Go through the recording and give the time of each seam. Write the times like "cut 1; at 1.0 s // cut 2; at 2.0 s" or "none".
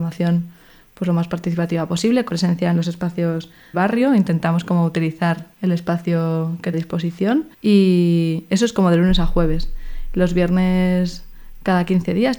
cut 1; at 2.3 s // cut 2; at 3.7 s // cut 3; at 5.5 s // cut 4; at 6.7 s // cut 5; at 7.5 s